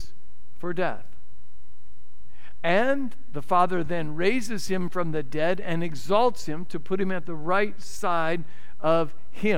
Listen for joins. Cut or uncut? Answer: uncut